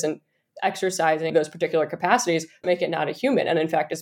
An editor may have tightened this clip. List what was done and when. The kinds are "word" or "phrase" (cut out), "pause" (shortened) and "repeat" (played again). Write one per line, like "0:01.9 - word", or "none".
0:01.3 - word
0:02.6 - word